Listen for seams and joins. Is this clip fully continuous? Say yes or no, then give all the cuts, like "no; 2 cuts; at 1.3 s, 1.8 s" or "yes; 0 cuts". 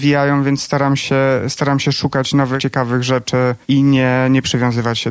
no; 1 cut; at 3.6 s